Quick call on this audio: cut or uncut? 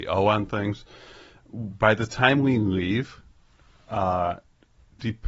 uncut